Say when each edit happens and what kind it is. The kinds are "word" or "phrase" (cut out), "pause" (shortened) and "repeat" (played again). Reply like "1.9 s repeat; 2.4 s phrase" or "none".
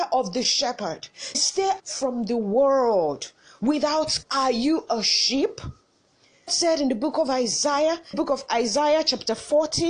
1.3 s word; 1.8 s word; 4.2 s word; 6.5 s word; 8.1 s word